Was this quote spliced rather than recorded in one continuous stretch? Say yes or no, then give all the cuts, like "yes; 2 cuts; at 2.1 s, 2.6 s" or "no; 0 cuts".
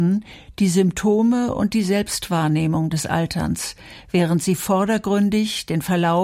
no; 0 cuts